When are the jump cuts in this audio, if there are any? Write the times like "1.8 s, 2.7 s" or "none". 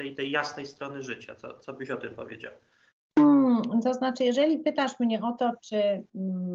2.9 s